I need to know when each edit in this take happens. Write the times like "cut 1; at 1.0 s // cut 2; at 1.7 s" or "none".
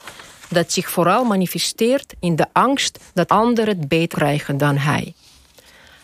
cut 1; at 3.3 s // cut 2; at 4.1 s